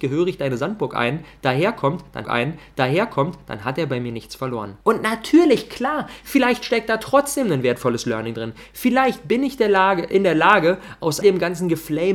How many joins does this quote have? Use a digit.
3